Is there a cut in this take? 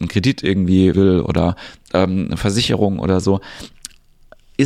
yes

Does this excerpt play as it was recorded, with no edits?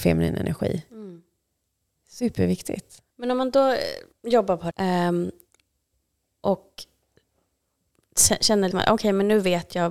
no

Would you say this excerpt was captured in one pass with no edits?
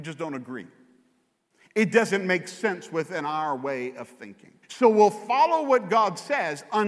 no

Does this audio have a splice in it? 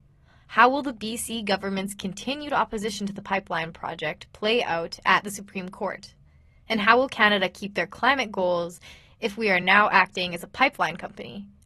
no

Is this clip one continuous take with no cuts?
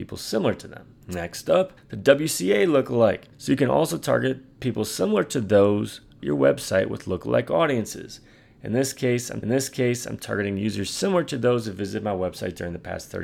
no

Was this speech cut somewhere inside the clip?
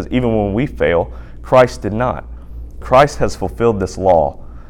yes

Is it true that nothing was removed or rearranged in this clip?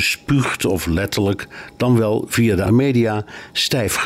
no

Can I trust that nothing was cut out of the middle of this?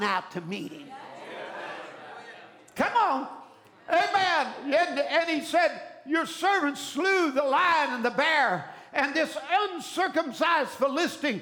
yes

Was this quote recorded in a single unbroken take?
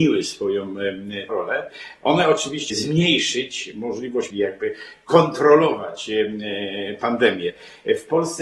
no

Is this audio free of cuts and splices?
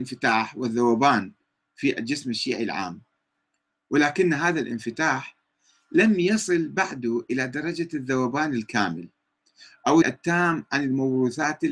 no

